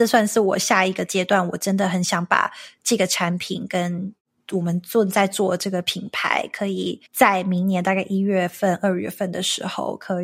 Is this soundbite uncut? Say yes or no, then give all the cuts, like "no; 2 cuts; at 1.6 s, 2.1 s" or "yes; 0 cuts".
no; 1 cut; at 7.1 s